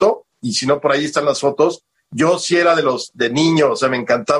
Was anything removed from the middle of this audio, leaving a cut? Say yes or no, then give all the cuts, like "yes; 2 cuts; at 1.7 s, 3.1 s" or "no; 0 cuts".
no; 0 cuts